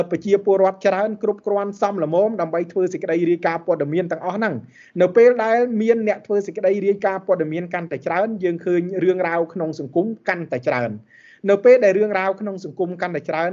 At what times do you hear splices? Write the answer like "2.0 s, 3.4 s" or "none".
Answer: none